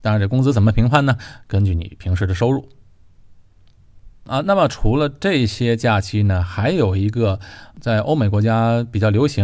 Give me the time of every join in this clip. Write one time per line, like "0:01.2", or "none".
0:04.2